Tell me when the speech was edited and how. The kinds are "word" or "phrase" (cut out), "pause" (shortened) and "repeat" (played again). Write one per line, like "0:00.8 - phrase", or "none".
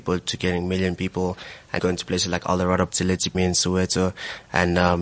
0:01.8 - word
0:02.9 - word
0:03.3 - word